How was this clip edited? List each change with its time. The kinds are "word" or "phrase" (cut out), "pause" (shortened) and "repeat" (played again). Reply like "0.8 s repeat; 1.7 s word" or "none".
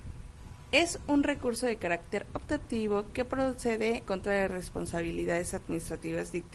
4.0 s word; 4.5 s phrase